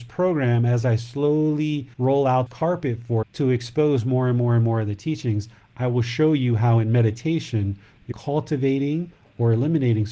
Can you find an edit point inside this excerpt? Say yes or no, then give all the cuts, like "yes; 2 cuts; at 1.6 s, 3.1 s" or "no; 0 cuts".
yes; 4 cuts; at 1.9 s, 2.5 s, 3.2 s, 8.1 s